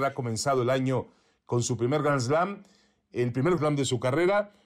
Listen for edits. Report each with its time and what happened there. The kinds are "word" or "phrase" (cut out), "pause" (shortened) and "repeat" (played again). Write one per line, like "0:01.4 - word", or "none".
0:03.6 - word